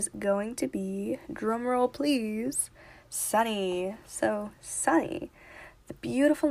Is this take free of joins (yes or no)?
yes